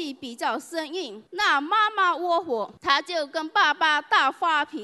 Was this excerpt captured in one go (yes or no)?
no